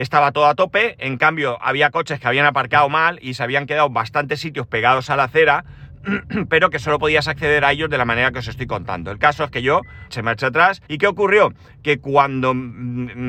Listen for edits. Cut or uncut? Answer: cut